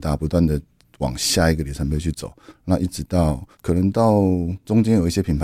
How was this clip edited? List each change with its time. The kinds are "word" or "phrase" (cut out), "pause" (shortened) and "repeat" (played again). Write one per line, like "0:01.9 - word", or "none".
0:03.5 - pause